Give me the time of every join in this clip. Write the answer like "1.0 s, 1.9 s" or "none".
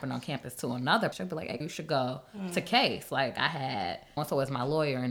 1.1 s, 1.6 s, 4.2 s